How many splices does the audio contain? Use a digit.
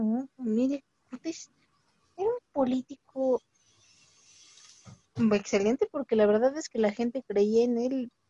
0